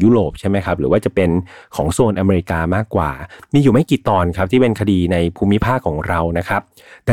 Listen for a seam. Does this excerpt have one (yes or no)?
no